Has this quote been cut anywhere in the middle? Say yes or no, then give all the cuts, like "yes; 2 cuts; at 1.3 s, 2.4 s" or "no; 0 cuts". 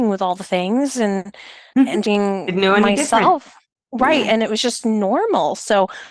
yes; 1 cut; at 2.0 s